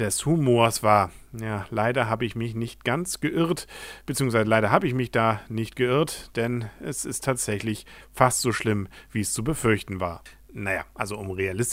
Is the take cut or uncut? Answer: uncut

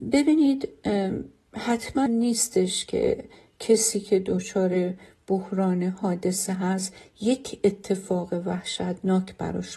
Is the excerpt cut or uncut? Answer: cut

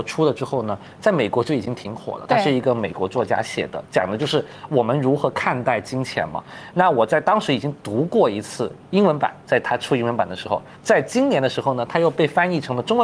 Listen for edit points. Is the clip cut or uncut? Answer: cut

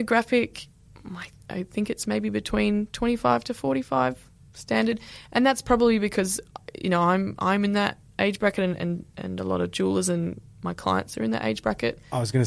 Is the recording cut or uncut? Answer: uncut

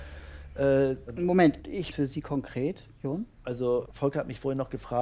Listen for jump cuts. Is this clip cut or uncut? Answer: cut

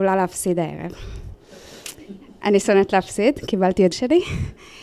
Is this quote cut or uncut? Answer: cut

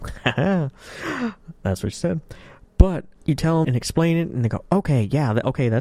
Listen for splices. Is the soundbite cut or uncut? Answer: cut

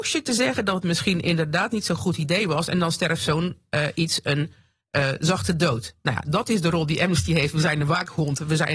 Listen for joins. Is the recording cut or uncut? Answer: uncut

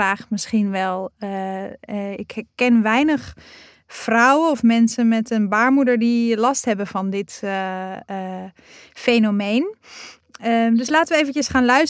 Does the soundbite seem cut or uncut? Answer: uncut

